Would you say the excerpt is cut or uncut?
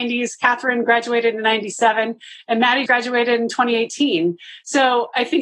cut